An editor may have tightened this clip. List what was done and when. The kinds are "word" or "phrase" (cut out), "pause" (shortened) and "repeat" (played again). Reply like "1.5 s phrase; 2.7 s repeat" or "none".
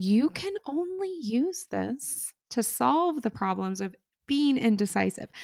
2.4 s pause